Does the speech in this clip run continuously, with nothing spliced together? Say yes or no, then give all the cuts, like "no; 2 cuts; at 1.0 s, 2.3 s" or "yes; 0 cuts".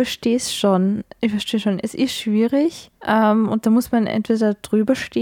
no; 1 cut; at 3.0 s